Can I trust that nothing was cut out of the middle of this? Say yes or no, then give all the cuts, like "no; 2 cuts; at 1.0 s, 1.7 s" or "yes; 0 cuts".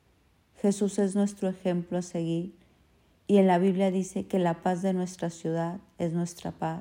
yes; 0 cuts